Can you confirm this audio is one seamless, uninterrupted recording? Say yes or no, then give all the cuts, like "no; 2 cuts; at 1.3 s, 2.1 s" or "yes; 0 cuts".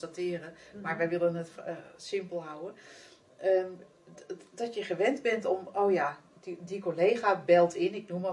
yes; 0 cuts